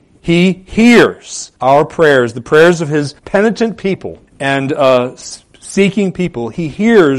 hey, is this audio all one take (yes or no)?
no